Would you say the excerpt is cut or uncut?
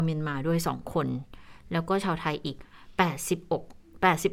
uncut